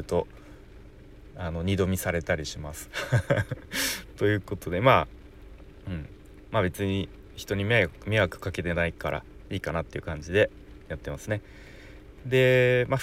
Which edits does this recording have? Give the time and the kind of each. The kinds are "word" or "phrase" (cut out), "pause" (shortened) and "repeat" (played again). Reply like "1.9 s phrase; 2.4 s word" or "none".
none